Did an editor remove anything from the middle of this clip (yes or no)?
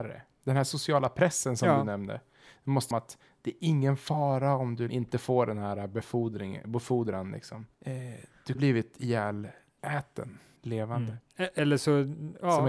yes